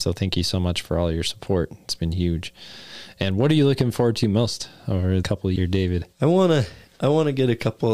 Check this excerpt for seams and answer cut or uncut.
cut